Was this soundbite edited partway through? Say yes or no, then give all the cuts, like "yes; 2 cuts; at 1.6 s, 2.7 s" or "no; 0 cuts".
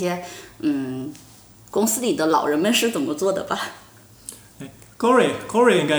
no; 0 cuts